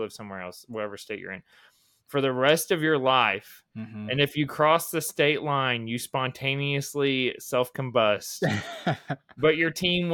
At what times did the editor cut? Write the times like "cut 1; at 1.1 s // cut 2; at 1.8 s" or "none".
none

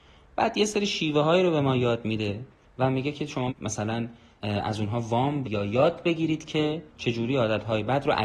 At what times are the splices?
cut 1; at 3.5 s // cut 2; at 5.4 s // cut 3; at 6.9 s

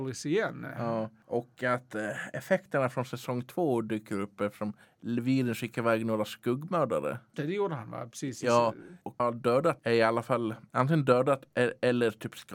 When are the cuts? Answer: cut 1; at 4.8 s // cut 2; at 7.3 s // cut 3; at 9.2 s

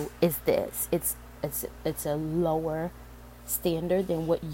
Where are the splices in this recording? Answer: none

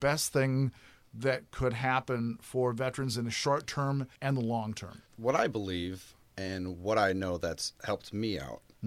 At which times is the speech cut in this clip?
cut 1; at 4.1 s // cut 2; at 5.1 s // cut 3; at 6.2 s

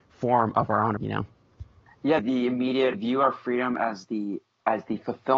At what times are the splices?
cut 1; at 1.0 s // cut 2; at 2.2 s // cut 3; at 2.9 s

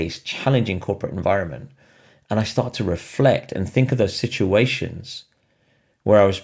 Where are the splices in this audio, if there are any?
none

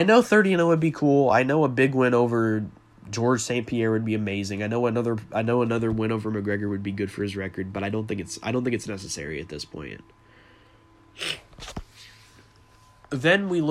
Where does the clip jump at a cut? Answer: none

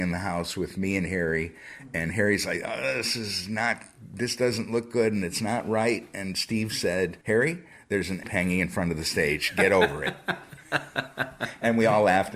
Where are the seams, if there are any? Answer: cut 1; at 7.2 s // cut 2; at 8.2 s

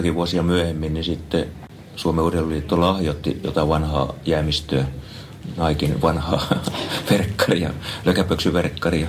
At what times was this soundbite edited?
none

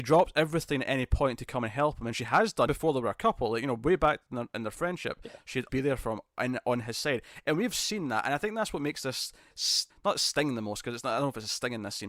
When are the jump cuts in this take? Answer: cut 1; at 2.7 s // cut 2; at 5.7 s // cut 3; at 9.9 s

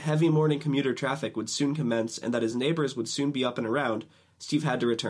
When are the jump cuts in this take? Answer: none

